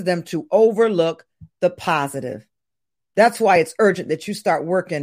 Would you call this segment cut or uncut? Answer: uncut